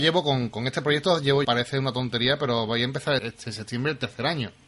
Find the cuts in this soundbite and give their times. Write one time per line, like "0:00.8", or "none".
0:01.4
0:03.2